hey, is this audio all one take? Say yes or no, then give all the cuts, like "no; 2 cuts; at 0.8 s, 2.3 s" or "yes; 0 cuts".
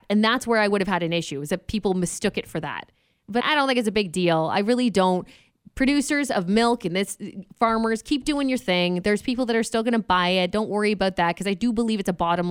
no; 1 cut; at 3.4 s